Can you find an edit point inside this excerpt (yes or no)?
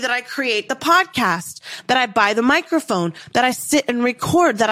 no